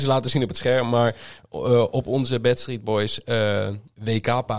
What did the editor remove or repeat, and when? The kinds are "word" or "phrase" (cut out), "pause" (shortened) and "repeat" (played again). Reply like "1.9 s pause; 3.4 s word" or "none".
none